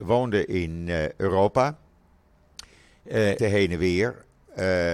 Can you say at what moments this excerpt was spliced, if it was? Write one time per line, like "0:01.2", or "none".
0:03.4